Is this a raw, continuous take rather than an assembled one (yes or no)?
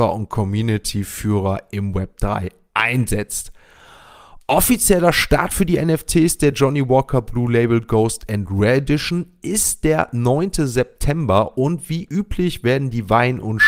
yes